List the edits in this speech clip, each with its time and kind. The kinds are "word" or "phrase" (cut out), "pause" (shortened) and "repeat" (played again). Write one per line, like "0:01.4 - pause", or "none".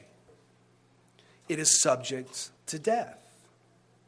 0:02.6 - pause